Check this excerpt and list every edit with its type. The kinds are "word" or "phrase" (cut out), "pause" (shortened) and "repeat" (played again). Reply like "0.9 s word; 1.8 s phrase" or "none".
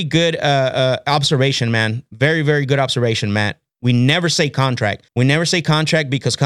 5.1 s pause